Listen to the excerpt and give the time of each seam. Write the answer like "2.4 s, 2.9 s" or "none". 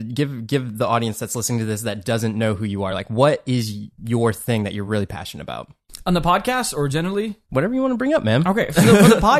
none